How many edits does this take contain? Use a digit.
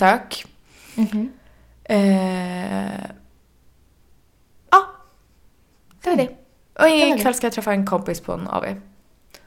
0